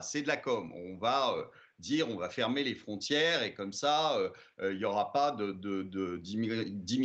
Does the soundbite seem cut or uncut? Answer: uncut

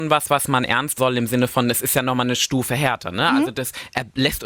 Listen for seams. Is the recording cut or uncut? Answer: cut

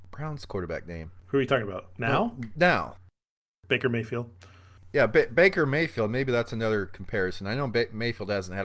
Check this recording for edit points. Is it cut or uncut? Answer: uncut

